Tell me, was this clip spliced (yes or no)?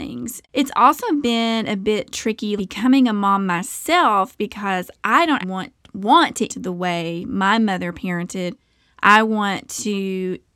yes